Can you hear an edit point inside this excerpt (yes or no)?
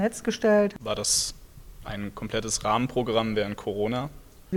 no